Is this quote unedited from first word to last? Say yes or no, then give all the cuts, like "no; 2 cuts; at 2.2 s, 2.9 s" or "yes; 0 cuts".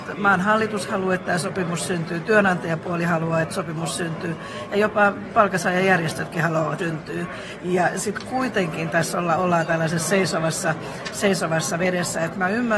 no; 1 cut; at 6.8 s